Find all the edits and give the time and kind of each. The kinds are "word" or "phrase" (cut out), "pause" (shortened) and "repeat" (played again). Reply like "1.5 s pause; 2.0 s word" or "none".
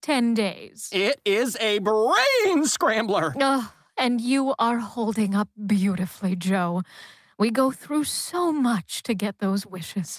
none